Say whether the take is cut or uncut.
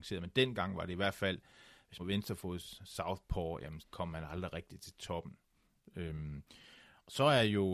cut